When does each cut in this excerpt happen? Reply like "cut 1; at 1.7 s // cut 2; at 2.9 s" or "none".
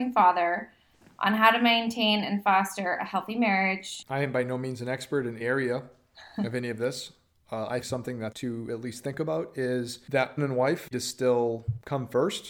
cut 1; at 5.4 s // cut 2; at 7.8 s // cut 3; at 8.3 s // cut 4; at 10.4 s // cut 5; at 10.9 s